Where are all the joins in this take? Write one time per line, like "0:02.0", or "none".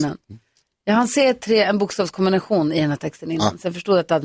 none